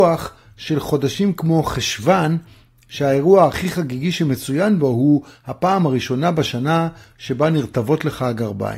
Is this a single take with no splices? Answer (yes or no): yes